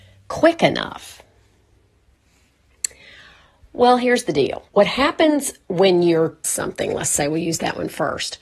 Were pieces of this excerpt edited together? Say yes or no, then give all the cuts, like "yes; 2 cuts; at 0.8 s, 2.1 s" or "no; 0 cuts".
yes; 2 cuts; at 4.7 s, 6.4 s